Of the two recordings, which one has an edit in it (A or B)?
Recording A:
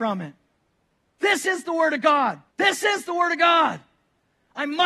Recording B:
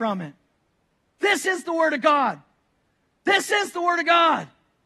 A